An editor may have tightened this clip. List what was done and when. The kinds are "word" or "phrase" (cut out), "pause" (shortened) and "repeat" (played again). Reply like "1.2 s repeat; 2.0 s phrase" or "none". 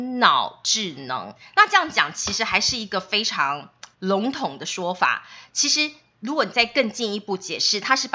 3.9 s pause